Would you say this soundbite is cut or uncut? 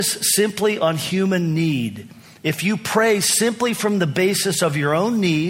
uncut